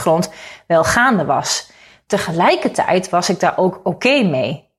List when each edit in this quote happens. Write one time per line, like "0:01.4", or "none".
none